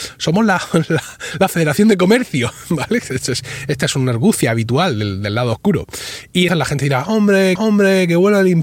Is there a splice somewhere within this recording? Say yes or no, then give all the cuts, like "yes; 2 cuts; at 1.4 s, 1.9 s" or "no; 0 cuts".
yes; 2 cuts; at 6.5 s, 7.6 s